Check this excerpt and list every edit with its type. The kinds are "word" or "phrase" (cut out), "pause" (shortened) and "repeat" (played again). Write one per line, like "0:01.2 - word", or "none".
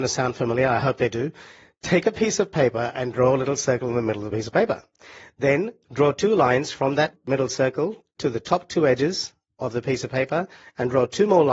none